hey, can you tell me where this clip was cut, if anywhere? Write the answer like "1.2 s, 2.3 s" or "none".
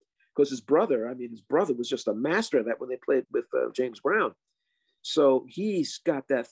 3.2 s